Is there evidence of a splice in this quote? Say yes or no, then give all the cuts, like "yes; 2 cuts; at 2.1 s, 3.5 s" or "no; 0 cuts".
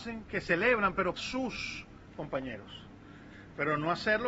yes; 1 cut; at 1.2 s